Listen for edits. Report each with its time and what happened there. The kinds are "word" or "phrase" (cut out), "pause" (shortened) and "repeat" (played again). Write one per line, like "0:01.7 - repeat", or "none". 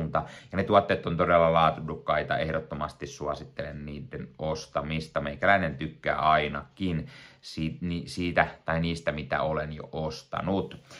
none